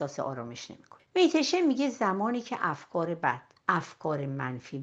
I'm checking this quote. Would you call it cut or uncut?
uncut